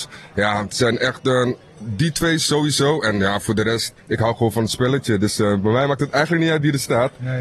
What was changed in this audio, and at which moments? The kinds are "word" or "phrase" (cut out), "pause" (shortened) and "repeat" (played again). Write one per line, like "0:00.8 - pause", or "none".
0:04.0 - pause